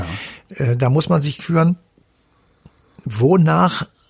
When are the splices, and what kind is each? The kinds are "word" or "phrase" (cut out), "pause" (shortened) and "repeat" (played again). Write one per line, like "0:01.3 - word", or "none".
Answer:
0:01.4 - phrase